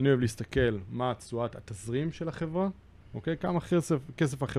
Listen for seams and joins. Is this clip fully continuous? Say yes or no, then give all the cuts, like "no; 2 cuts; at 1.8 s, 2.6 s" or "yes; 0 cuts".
yes; 0 cuts